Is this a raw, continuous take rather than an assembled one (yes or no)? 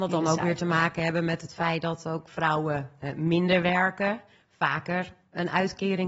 yes